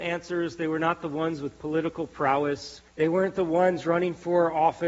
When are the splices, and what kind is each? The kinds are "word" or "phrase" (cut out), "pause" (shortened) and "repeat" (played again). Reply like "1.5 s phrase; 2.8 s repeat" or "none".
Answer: 2.9 s pause